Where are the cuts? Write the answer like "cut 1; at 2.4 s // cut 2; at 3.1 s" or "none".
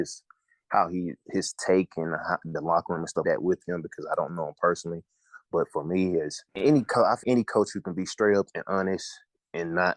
cut 1; at 3.2 s // cut 2; at 6.5 s // cut 3; at 7.2 s